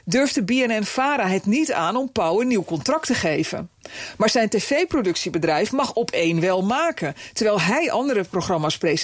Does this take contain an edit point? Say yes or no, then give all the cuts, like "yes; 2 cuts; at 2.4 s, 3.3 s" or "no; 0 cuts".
no; 0 cuts